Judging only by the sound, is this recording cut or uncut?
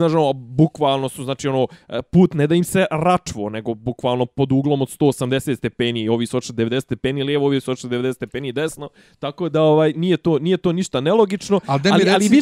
cut